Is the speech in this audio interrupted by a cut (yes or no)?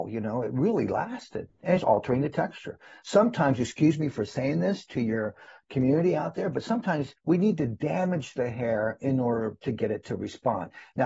yes